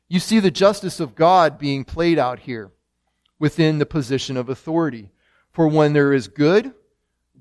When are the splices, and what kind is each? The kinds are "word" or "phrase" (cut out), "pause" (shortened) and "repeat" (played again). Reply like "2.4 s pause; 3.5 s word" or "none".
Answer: none

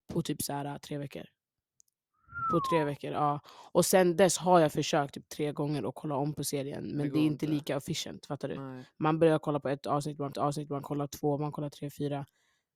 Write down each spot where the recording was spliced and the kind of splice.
10.3 s repeat

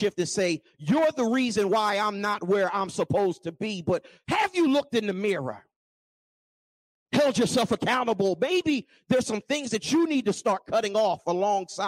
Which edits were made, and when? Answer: none

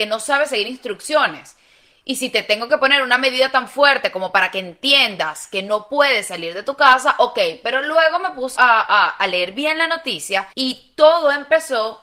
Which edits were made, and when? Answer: 8.6 s word; 10.5 s pause

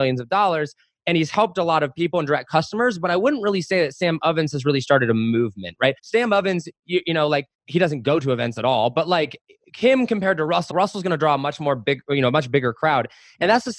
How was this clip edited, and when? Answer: 6.0 s pause; 7.5 s pause; 10.7 s word

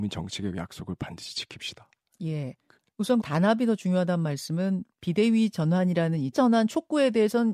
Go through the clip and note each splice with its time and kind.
3.2 s word; 6.3 s word

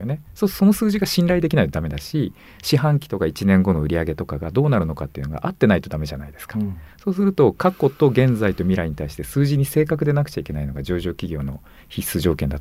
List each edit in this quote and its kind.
none

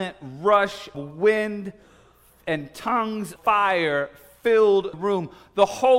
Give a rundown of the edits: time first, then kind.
0.9 s word; 3.4 s word; 4.9 s word

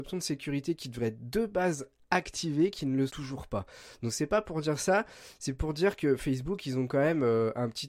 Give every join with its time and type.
3.1 s word

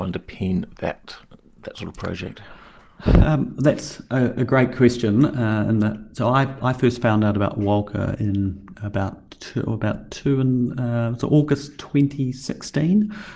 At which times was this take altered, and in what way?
none

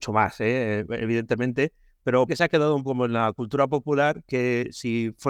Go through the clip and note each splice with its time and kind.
2.3 s word; 2.8 s word

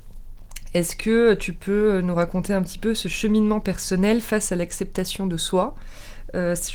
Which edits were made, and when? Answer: none

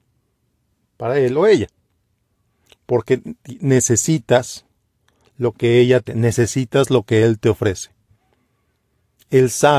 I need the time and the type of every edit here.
6.1 s word

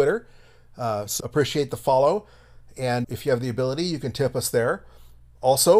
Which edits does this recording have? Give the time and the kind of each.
1.2 s word; 3.0 s word

